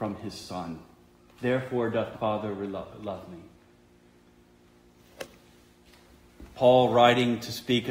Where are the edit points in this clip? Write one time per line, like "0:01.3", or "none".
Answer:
0:02.1